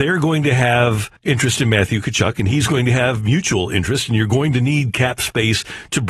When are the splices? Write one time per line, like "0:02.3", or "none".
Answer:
0:01.2